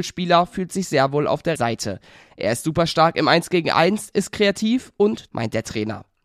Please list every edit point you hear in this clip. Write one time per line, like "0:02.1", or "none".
0:01.6
0:05.3